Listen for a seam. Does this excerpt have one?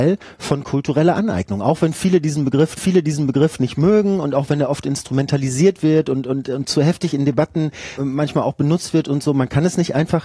yes; 2 cuts; at 2.7 s, 7.9 s

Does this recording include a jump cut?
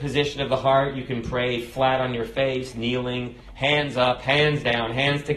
no; 0 cuts

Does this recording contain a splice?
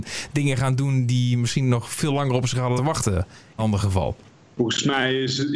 yes; 3 cuts; at 2.8 s, 3.6 s, 4.4 s

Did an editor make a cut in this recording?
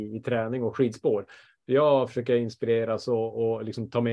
no; 0 cuts

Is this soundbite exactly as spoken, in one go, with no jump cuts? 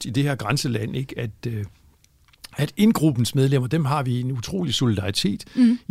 yes; 0 cuts

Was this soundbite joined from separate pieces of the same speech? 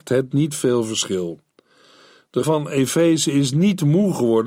yes; 1 cut; at 2.4 s

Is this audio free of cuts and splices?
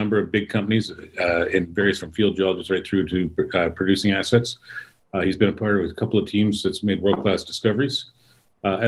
no; 1 cut; at 2.0 s

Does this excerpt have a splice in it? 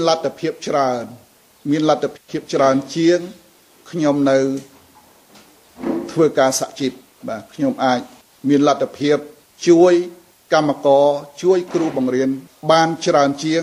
no; 0 cuts

